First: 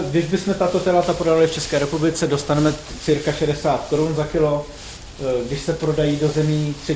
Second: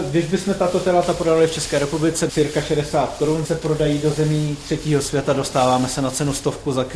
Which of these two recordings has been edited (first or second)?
second